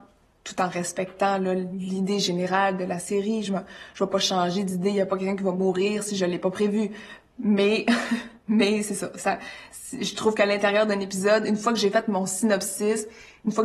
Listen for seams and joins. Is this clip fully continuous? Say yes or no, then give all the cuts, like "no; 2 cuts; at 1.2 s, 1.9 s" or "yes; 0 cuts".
yes; 0 cuts